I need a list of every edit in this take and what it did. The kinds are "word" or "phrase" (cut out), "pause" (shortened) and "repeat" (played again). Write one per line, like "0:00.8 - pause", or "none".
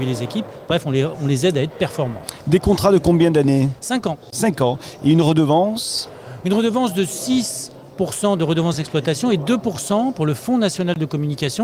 none